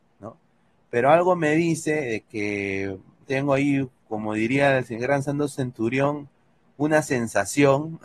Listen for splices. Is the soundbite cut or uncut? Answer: uncut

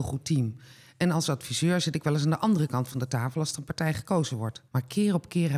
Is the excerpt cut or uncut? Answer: cut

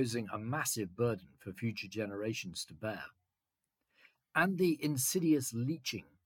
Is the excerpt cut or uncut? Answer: uncut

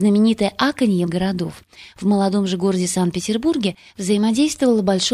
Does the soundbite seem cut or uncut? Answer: cut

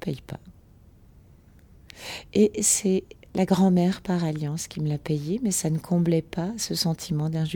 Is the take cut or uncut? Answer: uncut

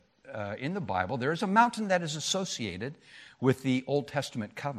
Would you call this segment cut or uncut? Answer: uncut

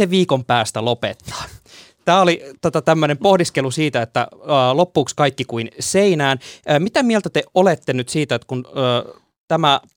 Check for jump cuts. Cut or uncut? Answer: uncut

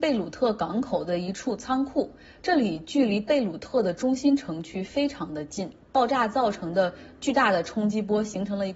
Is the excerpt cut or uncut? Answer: uncut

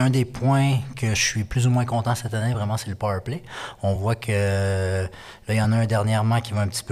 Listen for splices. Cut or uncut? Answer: uncut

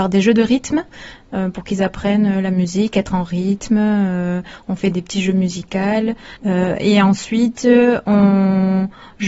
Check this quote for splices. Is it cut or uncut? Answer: cut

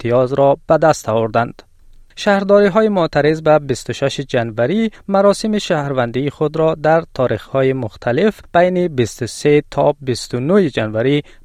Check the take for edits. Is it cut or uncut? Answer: uncut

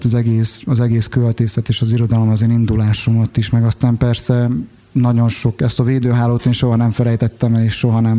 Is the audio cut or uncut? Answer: uncut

